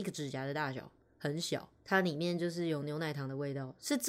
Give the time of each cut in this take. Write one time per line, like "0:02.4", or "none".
none